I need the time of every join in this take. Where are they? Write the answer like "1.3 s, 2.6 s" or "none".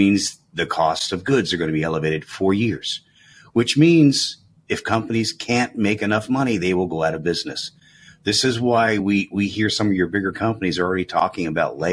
none